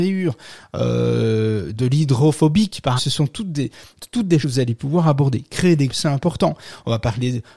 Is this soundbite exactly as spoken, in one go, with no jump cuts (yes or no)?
no